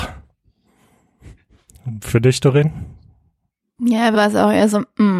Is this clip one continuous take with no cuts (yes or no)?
no